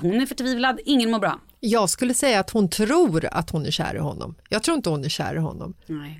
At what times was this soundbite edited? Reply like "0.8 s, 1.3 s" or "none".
none